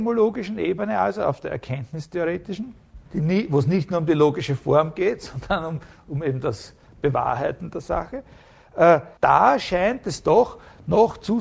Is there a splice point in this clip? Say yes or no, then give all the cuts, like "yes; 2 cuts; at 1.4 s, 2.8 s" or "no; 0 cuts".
yes; 2 cuts; at 3.1 s, 9.2 s